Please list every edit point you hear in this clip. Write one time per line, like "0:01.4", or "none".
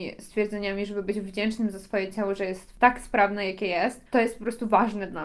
0:04.1